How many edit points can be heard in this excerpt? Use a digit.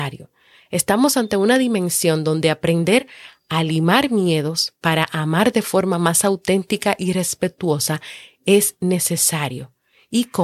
0